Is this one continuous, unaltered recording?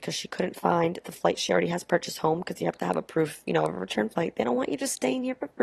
yes; 0 cuts

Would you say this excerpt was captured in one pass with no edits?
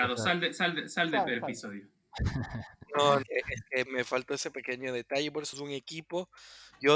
no; 3 cuts; at 3.2 s, 3.9 s, 5.5 s

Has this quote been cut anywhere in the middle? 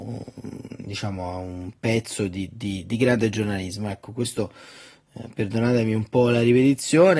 no; 0 cuts

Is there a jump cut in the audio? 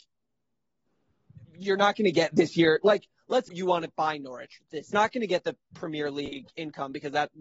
yes; 2 cuts; at 3.5 s, 4.9 s

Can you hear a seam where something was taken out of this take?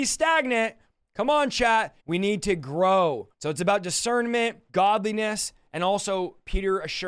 yes; 3 cuts; at 2.0 s, 3.3 s, 4.7 s

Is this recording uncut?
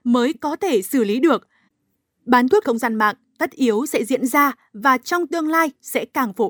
no; 1 cut; at 2.6 s

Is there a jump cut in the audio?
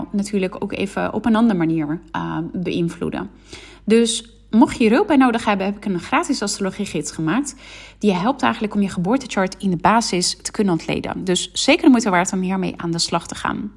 no; 0 cuts

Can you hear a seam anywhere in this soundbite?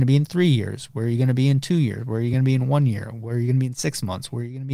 no; 0 cuts

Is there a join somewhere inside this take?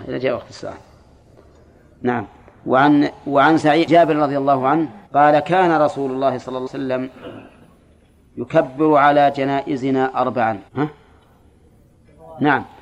yes; 4 cuts; at 3.9 s, 5.1 s, 6.7 s, 10.7 s

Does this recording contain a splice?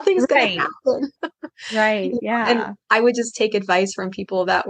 yes; 2 cuts; at 1.2 s, 2.8 s

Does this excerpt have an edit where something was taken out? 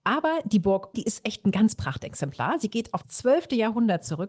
yes; 3 cuts; at 0.9 s, 1.7 s, 3.0 s

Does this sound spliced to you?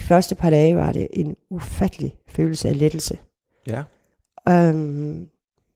no; 0 cuts

